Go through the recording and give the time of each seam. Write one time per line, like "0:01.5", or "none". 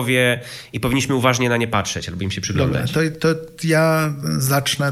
none